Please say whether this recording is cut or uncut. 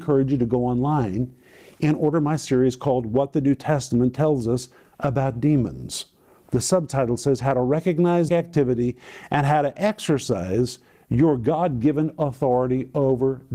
cut